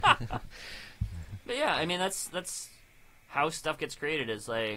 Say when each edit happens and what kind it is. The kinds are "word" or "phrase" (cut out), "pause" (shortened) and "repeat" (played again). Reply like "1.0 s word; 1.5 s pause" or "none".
none